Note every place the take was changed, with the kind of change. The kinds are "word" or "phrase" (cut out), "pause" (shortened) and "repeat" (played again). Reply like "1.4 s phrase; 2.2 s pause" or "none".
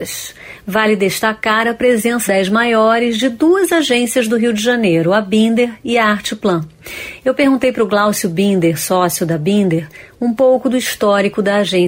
2.3 s phrase